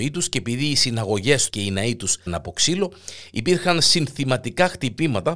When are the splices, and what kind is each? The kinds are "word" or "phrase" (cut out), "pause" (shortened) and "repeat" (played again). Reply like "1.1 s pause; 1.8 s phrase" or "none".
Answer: 1.5 s word; 2.3 s word